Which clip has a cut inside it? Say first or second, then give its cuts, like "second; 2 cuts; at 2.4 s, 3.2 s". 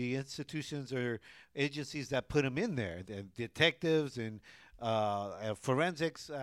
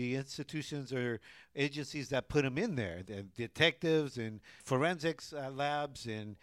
second; 1 cut; at 4.6 s